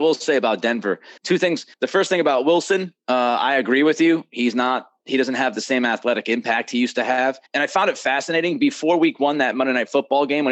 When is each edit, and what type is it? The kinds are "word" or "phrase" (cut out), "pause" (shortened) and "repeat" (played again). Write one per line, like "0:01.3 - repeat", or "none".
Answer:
0:01.2 - pause
0:01.7 - pause
0:07.5 - pause